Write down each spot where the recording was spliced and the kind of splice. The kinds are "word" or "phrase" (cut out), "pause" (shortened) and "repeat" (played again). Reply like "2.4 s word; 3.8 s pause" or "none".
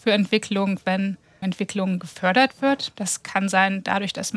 1.4 s word